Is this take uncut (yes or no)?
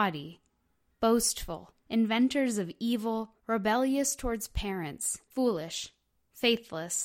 no